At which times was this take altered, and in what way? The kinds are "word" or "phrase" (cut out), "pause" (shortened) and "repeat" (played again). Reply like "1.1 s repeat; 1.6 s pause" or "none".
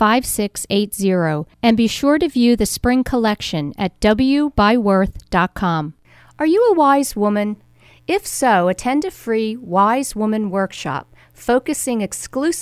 none